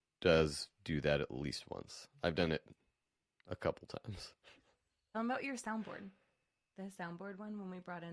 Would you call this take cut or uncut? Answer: uncut